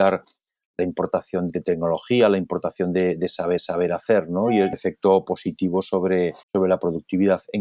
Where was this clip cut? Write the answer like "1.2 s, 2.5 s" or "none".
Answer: 1.5 s, 3.6 s, 4.7 s, 6.4 s